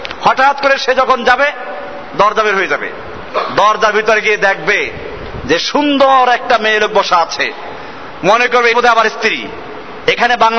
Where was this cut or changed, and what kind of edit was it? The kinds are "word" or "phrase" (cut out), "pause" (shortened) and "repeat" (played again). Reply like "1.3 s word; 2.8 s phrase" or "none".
8.7 s word